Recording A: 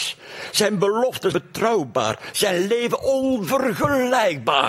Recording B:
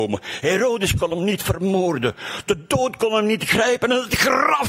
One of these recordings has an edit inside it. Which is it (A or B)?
A